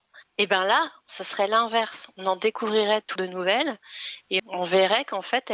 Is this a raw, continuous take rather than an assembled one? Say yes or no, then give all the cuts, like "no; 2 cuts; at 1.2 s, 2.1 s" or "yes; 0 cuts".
no; 2 cuts; at 3.2 s, 4.4 s